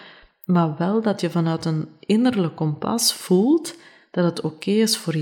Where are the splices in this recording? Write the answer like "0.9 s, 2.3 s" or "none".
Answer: none